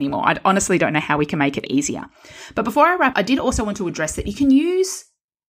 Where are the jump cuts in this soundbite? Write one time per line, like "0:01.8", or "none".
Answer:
0:01.7
0:03.1